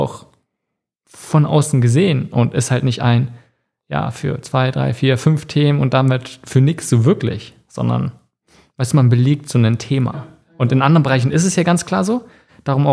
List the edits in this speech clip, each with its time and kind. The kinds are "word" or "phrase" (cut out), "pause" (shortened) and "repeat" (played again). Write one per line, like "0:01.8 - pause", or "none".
none